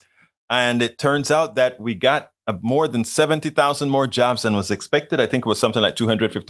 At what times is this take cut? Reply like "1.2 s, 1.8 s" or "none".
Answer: none